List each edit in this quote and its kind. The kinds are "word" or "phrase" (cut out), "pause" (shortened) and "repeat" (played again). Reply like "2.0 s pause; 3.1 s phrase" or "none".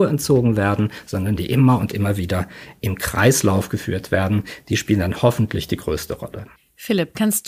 none